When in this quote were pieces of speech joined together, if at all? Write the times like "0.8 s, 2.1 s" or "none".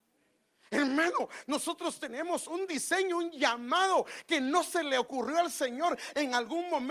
none